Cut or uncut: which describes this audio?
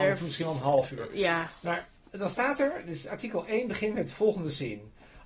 uncut